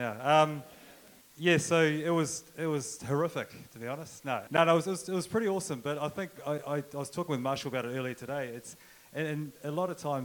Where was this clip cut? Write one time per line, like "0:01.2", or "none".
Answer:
0:01.2
0:04.5
0:06.4